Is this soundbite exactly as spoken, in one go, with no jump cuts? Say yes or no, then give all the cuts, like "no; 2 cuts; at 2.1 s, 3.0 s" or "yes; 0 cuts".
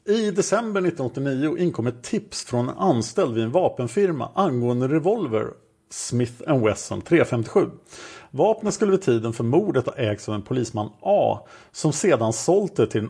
yes; 0 cuts